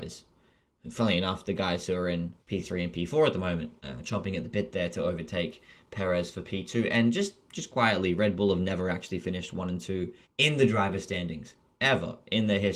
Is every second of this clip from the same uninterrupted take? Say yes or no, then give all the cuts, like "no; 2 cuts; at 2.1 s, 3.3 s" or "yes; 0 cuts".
no; 3 cuts; at 2.4 s, 3.8 s, 10.2 s